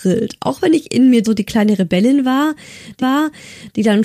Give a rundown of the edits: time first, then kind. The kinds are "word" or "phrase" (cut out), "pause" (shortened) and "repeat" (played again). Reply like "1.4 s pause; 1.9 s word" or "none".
1.2 s phrase; 3.0 s repeat